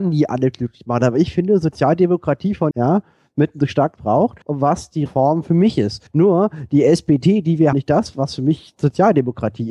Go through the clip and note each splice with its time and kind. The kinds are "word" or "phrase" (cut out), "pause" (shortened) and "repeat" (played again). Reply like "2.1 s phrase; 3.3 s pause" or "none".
2.7 s phrase; 4.0 s phrase; 4.4 s pause; 5.1 s word; 6.1 s pause; 7.7 s phrase